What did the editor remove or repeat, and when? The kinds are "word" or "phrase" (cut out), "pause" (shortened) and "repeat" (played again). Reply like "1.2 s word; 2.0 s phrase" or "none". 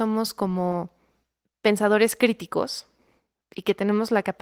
none

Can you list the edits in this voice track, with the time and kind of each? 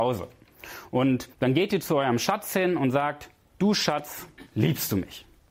1.3 s pause; 4.5 s pause

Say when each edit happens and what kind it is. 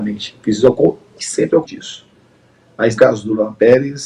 1.2 s word; 1.6 s word; 3.0 s word

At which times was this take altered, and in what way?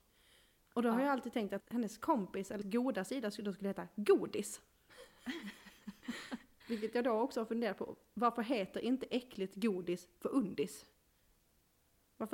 1.6 s word; 2.6 s word; 6.6 s word

